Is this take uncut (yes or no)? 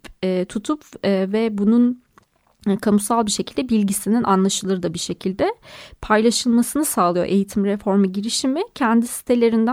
yes